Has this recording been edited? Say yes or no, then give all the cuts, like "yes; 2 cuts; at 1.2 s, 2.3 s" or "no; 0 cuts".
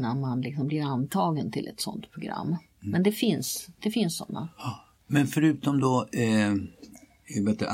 no; 0 cuts